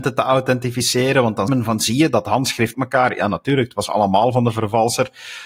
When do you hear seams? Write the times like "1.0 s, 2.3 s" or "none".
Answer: 1.5 s, 2.7 s